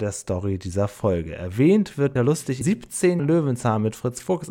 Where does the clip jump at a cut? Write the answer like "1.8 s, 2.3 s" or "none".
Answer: 2.2 s, 2.6 s, 3.2 s

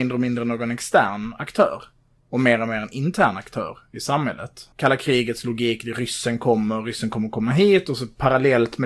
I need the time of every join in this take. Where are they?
none

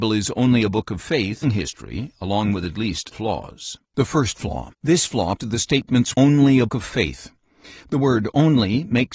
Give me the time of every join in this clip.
1.4 s, 3.1 s, 3.9 s, 4.7 s, 5.4 s, 6.1 s, 6.7 s

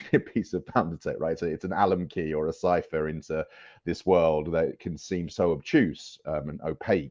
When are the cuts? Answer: none

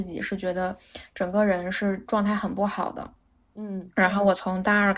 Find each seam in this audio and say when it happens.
none

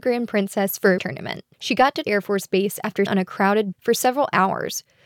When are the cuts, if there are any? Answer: 1.0 s, 1.5 s, 2.0 s, 3.1 s, 3.7 s

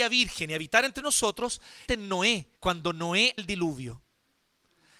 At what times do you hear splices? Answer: 1.9 s, 2.6 s, 3.4 s

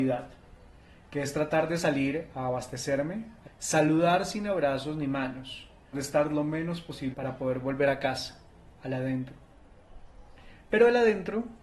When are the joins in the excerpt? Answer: 3.4 s, 5.9 s, 7.1 s

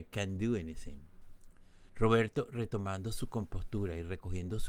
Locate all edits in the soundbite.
1.9 s

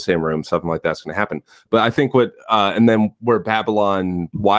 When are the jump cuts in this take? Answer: none

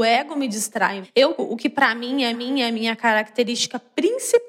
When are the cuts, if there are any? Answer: 1.0 s, 1.4 s, 2.3 s

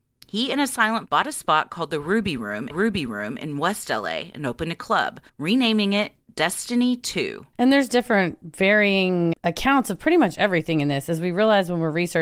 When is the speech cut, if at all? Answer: 1.1 s, 2.7 s, 5.3 s, 7.5 s, 9.3 s

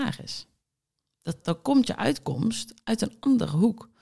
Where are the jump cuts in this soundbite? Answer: 1.4 s

